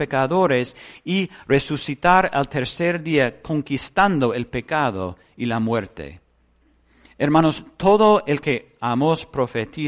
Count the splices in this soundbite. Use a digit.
1